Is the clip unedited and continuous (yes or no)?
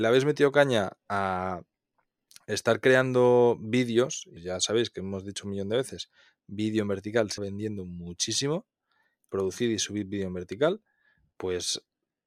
no